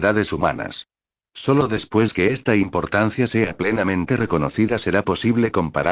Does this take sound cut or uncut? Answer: uncut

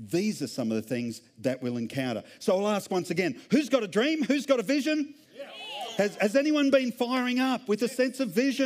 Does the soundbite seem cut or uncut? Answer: cut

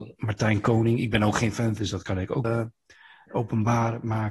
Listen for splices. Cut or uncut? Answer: cut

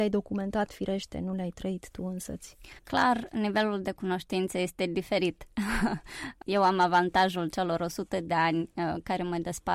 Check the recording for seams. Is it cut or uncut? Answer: cut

